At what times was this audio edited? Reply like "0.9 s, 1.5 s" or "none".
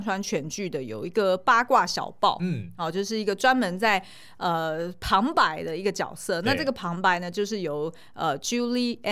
none